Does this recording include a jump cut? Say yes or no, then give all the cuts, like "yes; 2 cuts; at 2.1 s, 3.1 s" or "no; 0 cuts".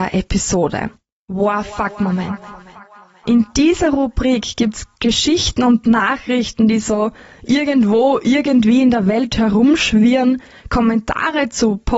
no; 0 cuts